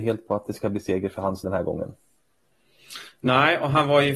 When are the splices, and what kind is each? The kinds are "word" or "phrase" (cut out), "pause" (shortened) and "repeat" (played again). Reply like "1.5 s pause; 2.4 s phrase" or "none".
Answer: 1.4 s word